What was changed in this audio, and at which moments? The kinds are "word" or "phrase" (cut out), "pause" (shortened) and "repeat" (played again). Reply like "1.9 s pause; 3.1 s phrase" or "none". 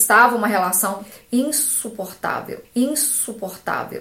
2.6 s repeat

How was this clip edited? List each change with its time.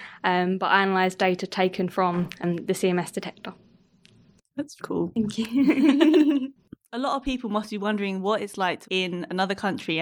4.8 s word; 8.8 s word

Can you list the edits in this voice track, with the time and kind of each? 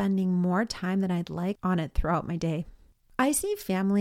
none

